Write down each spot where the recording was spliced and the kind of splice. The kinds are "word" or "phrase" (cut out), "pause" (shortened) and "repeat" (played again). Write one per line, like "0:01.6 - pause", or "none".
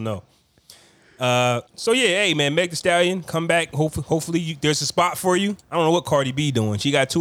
0:01.7 - pause
0:05.6 - pause